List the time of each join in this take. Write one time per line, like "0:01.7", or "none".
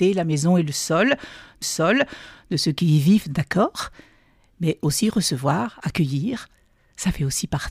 0:01.6